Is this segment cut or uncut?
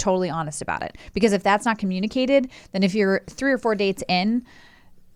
uncut